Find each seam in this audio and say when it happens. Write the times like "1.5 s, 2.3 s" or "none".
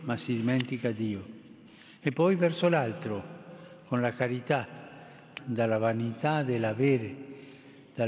5.4 s